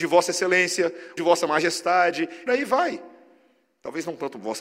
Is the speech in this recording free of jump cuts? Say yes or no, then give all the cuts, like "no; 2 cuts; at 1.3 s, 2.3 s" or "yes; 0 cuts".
no; 2 cuts; at 1.2 s, 2.5 s